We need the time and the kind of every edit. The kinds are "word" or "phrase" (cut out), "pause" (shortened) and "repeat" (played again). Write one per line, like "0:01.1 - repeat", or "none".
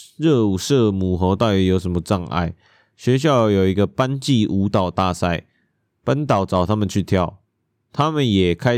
none